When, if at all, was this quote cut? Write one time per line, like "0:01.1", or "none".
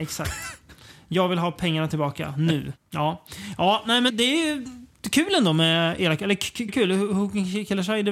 0:04.1
0:06.0
0:06.7